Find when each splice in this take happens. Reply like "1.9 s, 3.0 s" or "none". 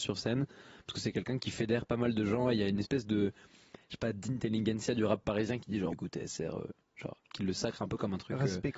1.4 s, 5.9 s